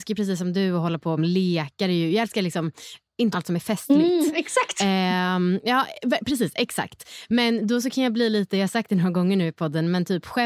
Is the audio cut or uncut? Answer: cut